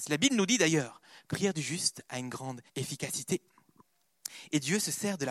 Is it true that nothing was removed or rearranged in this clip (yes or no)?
no